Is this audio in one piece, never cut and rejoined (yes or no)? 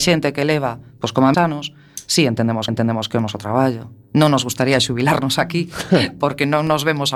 no